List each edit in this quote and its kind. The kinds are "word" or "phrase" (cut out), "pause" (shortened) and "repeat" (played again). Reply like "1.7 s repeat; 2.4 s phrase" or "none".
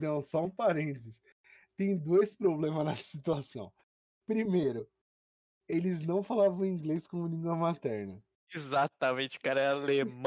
none

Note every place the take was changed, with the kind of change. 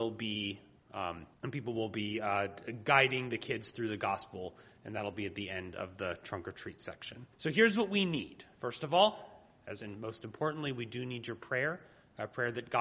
1.3 s pause; 7.3 s pause; 9.8 s word

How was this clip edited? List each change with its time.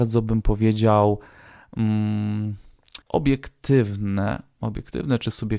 3.0 s pause

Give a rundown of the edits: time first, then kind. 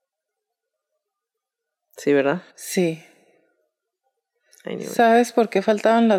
2.5 s pause

